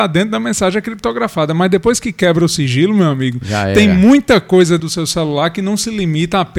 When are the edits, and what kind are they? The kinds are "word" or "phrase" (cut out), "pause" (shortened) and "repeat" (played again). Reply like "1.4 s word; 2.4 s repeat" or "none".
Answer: 4.8 s word